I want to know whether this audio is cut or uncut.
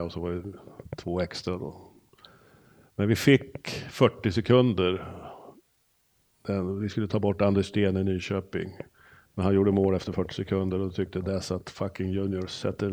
uncut